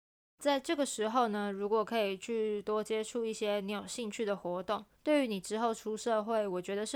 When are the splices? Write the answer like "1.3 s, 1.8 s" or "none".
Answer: 4.9 s